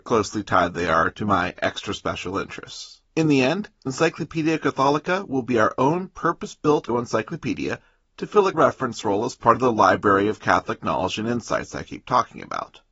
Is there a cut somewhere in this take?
yes; 4 cuts; at 3.0 s, 3.9 s, 6.9 s, 8.5 s

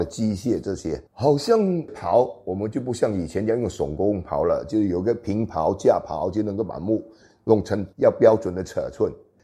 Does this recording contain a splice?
yes; 1 cut; at 1.1 s

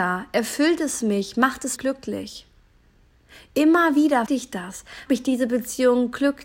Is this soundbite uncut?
no; 3 cuts; at 1.8 s, 4.3 s, 5.1 s

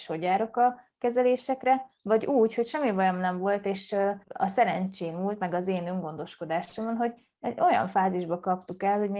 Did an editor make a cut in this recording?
yes; 1 cut; at 4.2 s

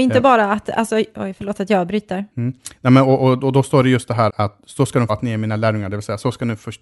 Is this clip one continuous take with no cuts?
no; 3 cuts; at 2.3 s, 4.3 s, 5.1 s

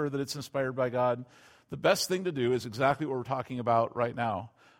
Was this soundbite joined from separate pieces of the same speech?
no; 0 cuts

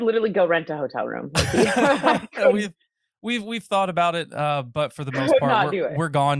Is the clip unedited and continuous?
yes; 0 cuts

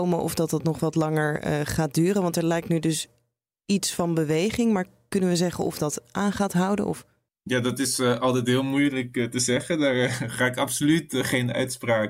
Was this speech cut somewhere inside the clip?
no; 0 cuts

